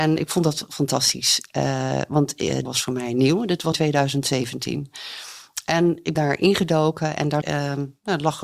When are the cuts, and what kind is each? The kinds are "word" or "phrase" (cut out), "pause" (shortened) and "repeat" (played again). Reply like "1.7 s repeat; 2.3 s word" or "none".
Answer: 2.6 s word; 3.7 s word; 6.2 s word; 7.4 s word